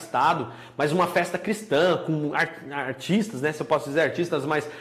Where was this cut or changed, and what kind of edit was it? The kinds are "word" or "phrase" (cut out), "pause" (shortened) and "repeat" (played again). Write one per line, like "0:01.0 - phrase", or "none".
none